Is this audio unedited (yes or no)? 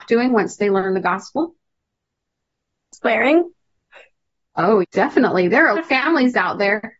no